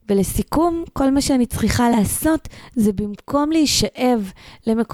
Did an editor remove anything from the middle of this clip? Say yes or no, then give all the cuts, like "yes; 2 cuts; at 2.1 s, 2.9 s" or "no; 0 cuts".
no; 0 cuts